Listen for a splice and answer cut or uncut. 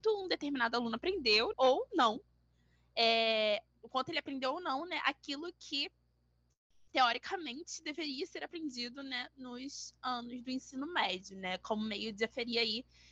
cut